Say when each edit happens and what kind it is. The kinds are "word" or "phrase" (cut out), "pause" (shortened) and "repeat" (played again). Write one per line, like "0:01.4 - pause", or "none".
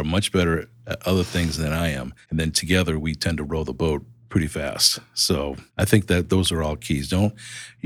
0:02.2 - pause
0:05.7 - pause